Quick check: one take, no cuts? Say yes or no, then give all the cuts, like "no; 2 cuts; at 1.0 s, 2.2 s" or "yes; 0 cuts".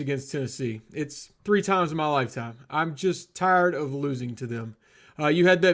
no; 1 cut; at 1.4 s